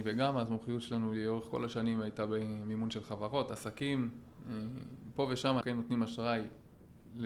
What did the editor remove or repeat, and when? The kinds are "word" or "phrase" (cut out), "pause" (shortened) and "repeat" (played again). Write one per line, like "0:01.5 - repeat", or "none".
0:05.6 - word